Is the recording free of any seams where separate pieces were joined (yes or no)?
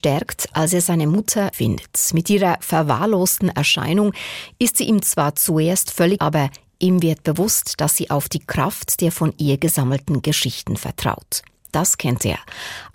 no